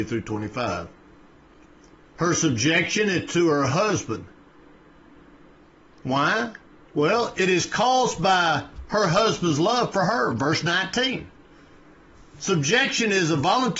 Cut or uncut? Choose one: uncut